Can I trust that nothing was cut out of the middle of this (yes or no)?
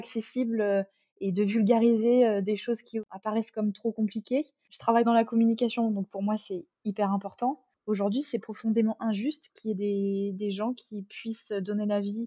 yes